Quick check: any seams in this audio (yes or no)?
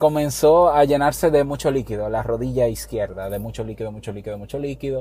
no